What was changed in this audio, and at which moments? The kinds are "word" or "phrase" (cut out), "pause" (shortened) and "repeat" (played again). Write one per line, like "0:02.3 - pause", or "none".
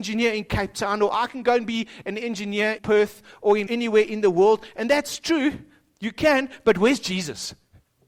0:02.8 - word
0:03.7 - phrase